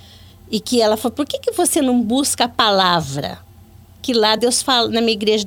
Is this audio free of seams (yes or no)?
yes